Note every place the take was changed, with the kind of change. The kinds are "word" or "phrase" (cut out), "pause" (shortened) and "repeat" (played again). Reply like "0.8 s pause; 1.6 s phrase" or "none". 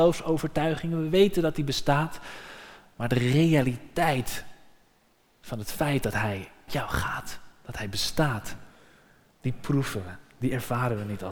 6.7 s word